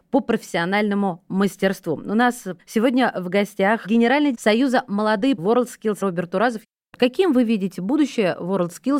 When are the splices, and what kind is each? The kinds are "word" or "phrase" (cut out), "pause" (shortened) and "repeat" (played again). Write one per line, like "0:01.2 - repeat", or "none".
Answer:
0:04.3 - word
0:05.4 - word
0:06.0 - word